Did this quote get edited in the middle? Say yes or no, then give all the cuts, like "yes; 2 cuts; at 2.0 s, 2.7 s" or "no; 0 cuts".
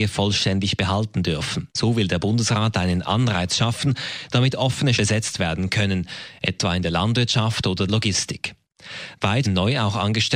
yes; 4 cuts; at 1.7 s, 5.0 s, 7.9 s, 9.5 s